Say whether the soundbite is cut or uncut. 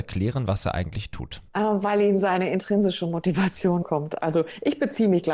cut